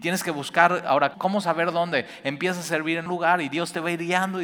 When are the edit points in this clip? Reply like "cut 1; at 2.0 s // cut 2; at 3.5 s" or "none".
cut 1; at 1.1 s // cut 2; at 3.1 s